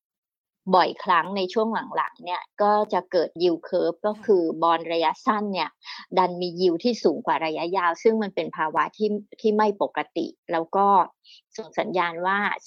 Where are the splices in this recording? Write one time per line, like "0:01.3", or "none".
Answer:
0:03.4